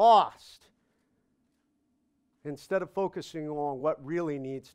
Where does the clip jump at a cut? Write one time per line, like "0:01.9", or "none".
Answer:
none